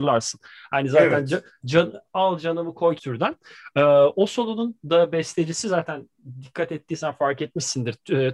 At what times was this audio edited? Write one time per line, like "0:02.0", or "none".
0:03.0